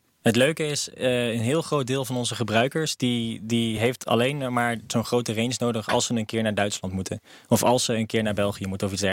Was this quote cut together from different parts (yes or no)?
no